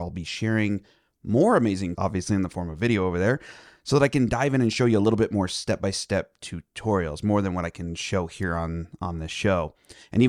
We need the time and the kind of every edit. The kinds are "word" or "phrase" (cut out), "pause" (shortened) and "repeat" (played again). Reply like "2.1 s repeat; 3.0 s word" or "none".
1.9 s phrase